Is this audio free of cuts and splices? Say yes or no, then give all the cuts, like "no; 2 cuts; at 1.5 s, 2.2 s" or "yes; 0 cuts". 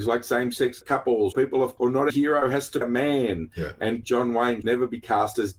no; 6 cuts; at 1.3 s, 1.8 s, 2.1 s, 2.8 s, 4.0 s, 4.6 s